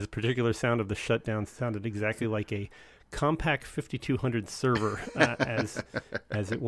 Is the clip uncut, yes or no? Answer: yes